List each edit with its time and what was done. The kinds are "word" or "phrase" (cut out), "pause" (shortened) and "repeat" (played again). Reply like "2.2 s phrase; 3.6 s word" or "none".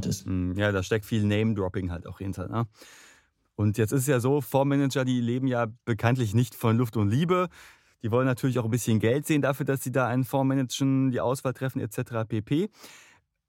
1.0 s word